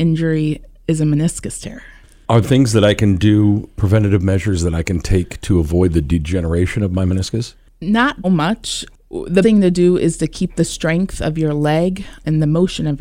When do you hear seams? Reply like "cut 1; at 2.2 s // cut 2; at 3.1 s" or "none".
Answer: cut 1; at 2.4 s // cut 2; at 8.2 s // cut 3; at 9.4 s